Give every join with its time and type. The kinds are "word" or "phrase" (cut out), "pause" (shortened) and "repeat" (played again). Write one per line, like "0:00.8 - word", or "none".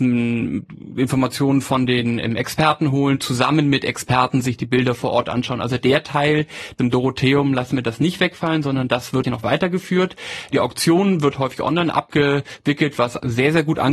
0:09.2 - word

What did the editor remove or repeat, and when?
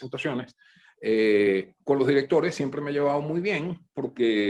0:01.8 - pause

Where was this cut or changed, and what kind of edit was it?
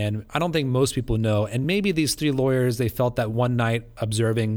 none

